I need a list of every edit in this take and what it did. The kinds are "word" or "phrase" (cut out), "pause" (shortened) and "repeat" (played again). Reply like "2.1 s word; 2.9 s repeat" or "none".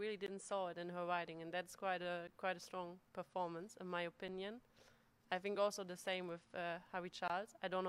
none